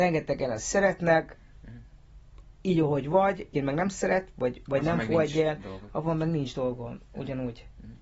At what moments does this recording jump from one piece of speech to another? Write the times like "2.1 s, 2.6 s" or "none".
3.5 s